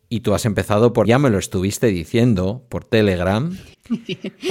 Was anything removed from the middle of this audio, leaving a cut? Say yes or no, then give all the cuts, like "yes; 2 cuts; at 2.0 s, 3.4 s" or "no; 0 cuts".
yes; 1 cut; at 1.0 s